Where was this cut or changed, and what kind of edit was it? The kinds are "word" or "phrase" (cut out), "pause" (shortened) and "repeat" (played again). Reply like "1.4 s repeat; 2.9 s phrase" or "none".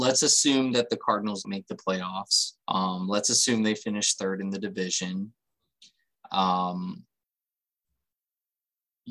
1.4 s word; 2.6 s pause